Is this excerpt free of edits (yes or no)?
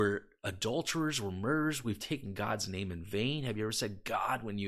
yes